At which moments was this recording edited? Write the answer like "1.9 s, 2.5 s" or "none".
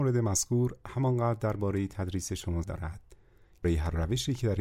2.6 s, 3.6 s